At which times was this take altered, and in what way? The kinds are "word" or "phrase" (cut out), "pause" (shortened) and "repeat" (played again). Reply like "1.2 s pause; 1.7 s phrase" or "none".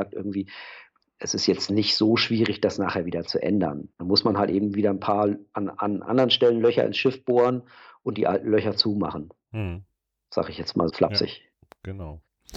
3.9 s pause; 10.9 s word